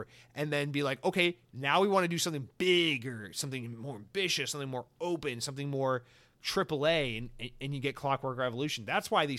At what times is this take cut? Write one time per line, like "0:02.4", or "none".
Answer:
none